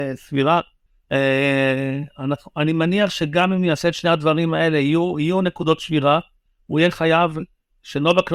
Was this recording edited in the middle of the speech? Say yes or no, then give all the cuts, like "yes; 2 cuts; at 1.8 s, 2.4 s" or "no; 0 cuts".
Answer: no; 0 cuts